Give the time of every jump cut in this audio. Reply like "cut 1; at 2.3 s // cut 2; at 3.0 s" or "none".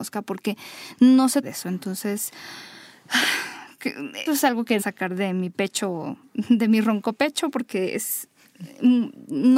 cut 1; at 1.4 s // cut 2; at 4.3 s // cut 3; at 4.8 s